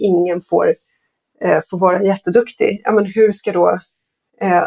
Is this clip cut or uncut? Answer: uncut